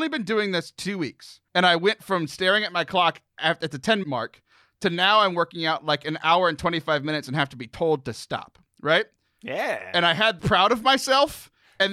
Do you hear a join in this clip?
yes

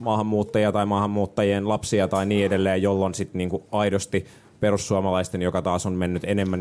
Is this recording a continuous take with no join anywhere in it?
yes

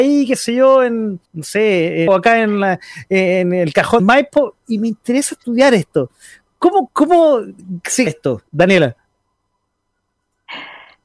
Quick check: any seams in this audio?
yes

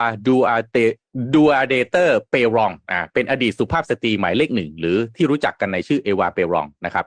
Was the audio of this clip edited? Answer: no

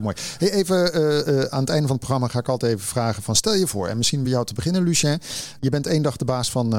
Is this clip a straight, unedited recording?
yes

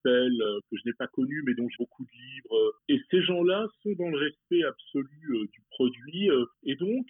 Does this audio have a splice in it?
yes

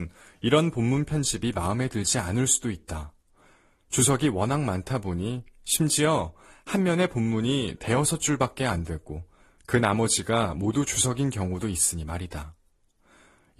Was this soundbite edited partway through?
no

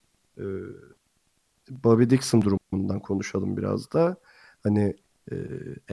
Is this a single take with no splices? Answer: yes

